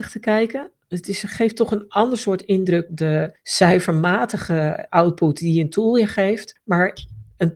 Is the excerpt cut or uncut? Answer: cut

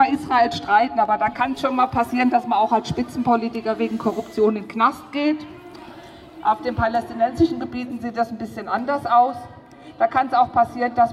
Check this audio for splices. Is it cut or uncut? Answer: uncut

